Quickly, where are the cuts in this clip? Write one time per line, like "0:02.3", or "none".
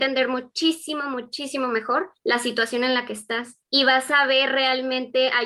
0:02.2
0:03.6